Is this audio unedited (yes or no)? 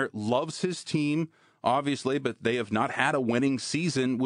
yes